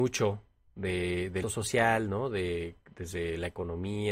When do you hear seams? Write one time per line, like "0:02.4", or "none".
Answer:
0:01.4